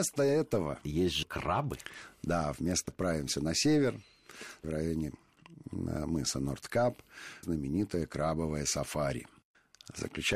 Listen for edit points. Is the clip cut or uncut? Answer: cut